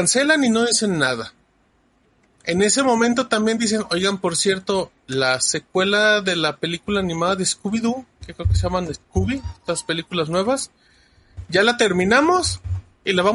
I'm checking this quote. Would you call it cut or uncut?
uncut